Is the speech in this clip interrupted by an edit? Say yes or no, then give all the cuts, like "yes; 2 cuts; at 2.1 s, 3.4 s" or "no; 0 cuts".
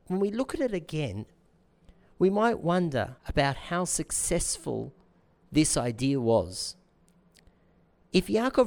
yes; 1 cut; at 3.2 s